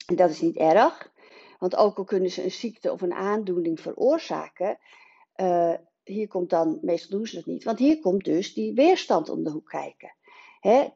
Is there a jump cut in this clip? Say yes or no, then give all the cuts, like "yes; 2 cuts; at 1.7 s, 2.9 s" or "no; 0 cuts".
no; 0 cuts